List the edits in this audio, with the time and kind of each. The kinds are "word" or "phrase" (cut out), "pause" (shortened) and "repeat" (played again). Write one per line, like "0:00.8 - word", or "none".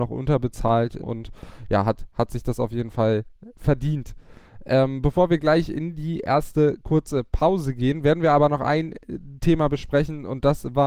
0:01.0 - word